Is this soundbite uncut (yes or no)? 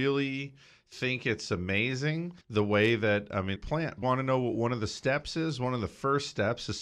no